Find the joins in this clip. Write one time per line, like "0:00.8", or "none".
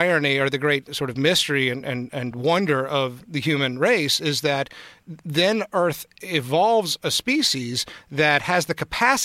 none